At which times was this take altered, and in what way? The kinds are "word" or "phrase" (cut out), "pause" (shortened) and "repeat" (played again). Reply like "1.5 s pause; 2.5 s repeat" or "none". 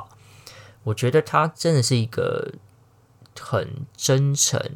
none